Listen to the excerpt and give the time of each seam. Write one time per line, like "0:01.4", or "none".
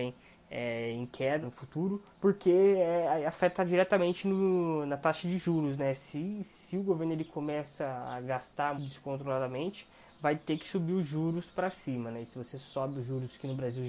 0:01.4
0:02.1
0:08.8